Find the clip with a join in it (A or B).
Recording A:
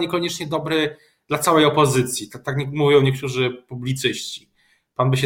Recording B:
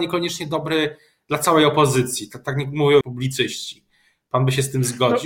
B